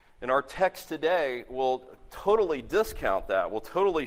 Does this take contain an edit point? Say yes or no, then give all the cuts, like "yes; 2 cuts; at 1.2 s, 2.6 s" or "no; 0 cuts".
no; 0 cuts